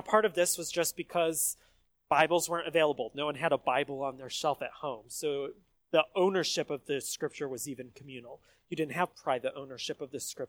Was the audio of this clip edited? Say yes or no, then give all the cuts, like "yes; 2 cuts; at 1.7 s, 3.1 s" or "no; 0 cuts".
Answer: no; 0 cuts